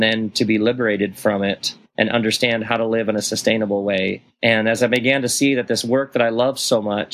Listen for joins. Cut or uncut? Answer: uncut